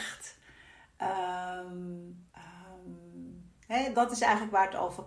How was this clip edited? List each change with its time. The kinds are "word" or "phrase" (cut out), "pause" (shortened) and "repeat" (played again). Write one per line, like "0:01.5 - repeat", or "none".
0:02.3 - pause
0:03.9 - word

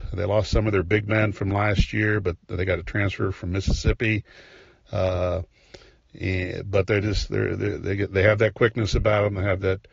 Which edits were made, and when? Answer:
none

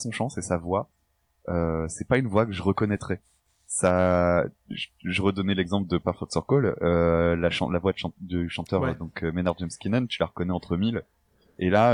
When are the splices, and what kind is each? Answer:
none

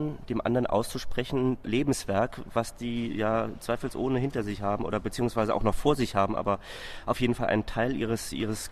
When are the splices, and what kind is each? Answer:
0:01.6 - phrase

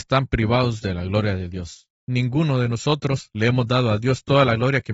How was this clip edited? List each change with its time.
0:02.0 - pause

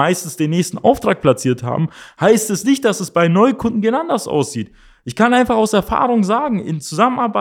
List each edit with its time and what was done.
none

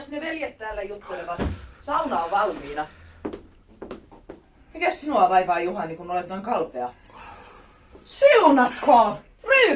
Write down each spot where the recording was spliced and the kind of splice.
none

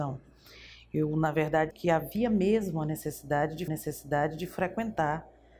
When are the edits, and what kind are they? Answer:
0:01.7 - word
0:03.7 - repeat

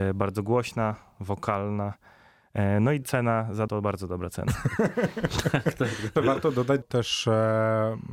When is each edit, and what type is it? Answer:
0:03.0 - phrase
0:03.7 - word
0:06.2 - word
0:06.8 - phrase

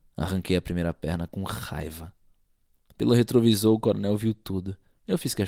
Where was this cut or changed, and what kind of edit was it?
none

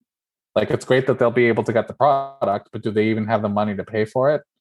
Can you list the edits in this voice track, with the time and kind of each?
none

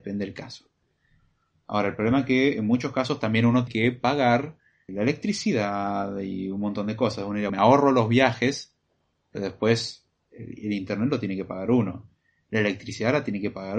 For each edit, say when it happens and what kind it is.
0:03.7 - word
0:04.9 - word
0:07.5 - word

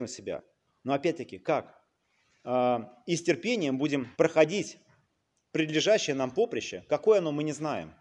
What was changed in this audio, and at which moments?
0:04.1 - pause

